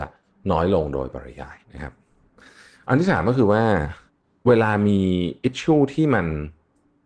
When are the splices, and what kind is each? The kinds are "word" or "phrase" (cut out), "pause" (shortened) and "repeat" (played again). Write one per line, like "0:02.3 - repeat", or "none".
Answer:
0:01.6 - pause